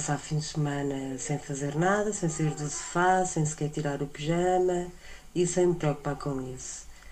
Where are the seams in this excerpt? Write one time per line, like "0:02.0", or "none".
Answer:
none